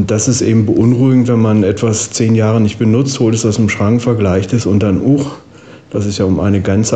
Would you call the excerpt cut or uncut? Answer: uncut